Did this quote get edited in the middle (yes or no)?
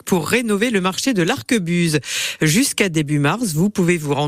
no